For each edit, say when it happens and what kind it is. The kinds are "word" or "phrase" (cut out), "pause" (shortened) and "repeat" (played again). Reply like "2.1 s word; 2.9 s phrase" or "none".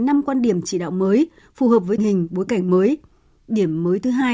2.0 s word

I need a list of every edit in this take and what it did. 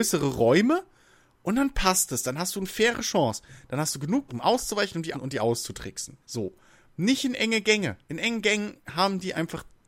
4.3 s word; 5.1 s word; 6.2 s pause; 8.0 s pause

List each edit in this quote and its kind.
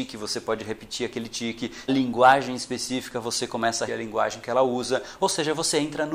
1.9 s phrase; 3.9 s word

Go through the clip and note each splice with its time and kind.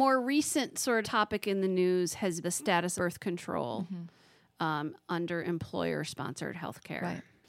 1.0 s word; 2.4 s word; 3.0 s word

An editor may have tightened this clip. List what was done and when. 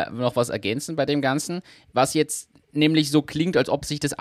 none

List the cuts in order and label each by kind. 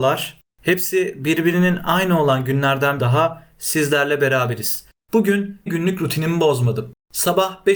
3.0 s word; 5.7 s word

